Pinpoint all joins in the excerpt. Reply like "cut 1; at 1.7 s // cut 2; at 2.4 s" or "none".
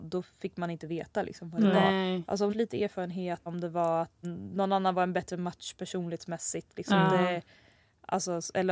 cut 1; at 2.5 s // cut 2; at 3.5 s // cut 3; at 4.2 s